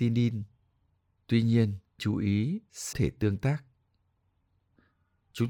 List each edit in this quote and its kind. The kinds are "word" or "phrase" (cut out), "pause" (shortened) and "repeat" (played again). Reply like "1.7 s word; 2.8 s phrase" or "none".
2.0 s word; 2.9 s phrase